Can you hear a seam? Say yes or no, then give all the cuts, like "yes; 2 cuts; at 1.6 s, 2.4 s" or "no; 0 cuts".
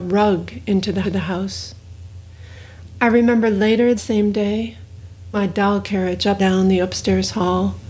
yes; 4 cuts; at 1.0 s, 4.0 s, 5.3 s, 6.4 s